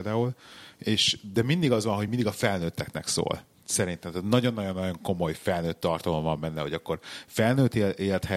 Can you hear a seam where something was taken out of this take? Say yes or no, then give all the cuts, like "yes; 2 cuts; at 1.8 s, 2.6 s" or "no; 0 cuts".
no; 0 cuts